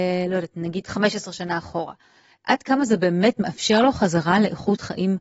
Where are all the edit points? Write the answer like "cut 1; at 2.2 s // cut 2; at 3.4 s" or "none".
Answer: none